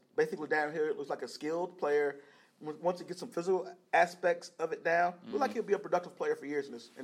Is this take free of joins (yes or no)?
yes